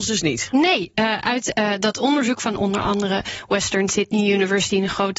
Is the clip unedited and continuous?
yes; 0 cuts

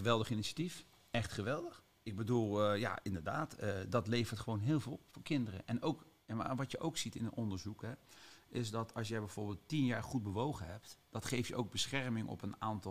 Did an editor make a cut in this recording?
no; 0 cuts

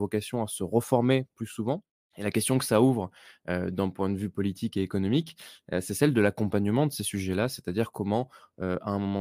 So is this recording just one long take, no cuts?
yes; 0 cuts

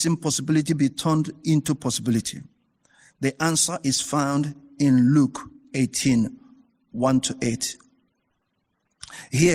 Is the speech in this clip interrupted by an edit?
no; 0 cuts

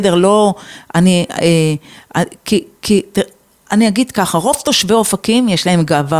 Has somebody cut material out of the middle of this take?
no; 0 cuts

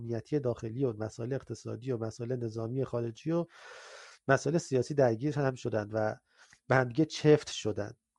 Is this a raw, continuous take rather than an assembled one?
yes; 0 cuts

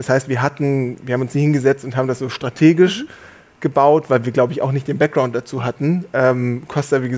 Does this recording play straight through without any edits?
yes; 0 cuts

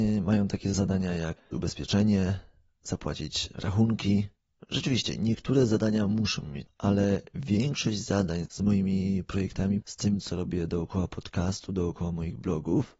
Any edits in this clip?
yes; 4 cuts; at 1.5 s, 6.7 s, 8.4 s, 9.8 s

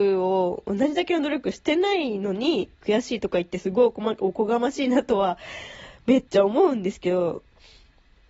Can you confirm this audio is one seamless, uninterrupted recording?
no; 1 cut; at 6.3 s

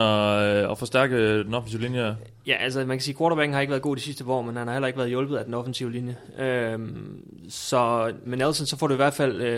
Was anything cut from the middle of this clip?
yes; 1 cut; at 8.2 s

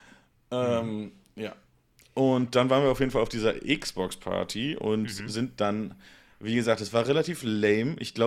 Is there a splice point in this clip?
no; 0 cuts

